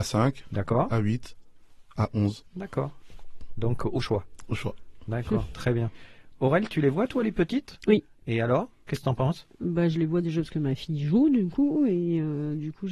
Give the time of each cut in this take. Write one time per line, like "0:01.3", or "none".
0:02.5
0:08.1